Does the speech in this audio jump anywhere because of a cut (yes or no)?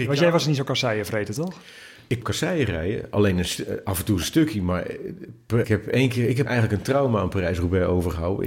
yes